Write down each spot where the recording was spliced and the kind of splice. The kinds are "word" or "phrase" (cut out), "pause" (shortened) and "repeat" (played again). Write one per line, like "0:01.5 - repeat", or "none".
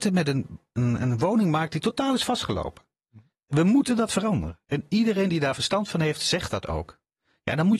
none